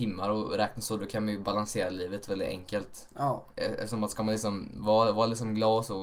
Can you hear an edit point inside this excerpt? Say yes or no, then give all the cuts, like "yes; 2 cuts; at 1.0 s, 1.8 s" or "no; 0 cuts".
no; 0 cuts